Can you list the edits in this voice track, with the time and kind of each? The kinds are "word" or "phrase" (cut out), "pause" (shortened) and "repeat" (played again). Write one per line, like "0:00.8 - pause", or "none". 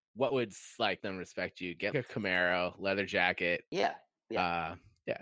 0:01.0 - word
0:01.9 - word
0:03.7 - pause